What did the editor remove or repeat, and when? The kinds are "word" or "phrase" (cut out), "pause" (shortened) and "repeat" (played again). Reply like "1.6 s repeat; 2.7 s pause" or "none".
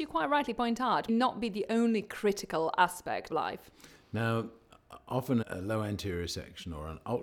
1.1 s word; 3.3 s phrase; 5.4 s word